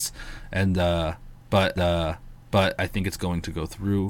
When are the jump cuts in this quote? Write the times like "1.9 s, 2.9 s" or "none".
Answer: 1.8 s